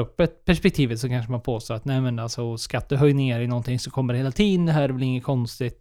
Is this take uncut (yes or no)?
yes